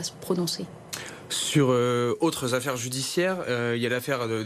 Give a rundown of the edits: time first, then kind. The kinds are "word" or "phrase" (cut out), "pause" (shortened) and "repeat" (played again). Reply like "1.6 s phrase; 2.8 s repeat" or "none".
none